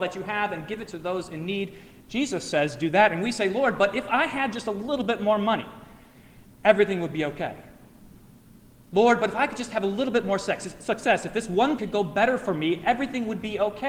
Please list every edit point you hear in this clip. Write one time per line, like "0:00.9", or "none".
0:11.8